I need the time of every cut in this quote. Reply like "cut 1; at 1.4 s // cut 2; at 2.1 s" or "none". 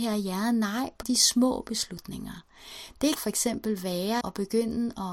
cut 1; at 1.0 s // cut 2; at 3.2 s // cut 3; at 4.2 s